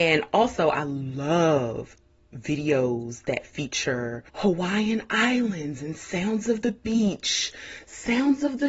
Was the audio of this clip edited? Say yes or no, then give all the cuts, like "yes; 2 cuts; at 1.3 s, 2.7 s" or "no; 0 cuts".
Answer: yes; 1 cut; at 4.3 s